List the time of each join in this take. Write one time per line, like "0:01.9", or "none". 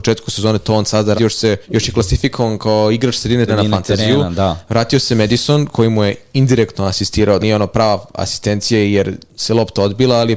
0:01.2
0:01.6
0:03.5
0:07.4